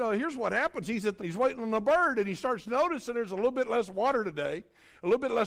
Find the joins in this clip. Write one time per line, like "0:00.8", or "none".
0:01.2